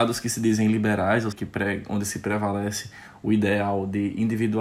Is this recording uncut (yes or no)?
no